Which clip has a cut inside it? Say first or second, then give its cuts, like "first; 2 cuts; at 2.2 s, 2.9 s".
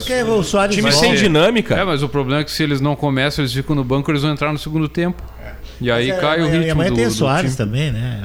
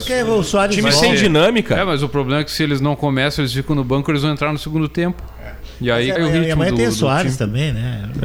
second; 1 cut; at 6.2 s